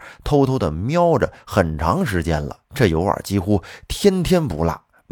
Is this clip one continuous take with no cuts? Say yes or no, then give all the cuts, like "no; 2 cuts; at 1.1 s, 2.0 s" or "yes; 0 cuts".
no; 1 cut; at 2.6 s